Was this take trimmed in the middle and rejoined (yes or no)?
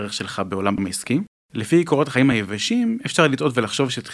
no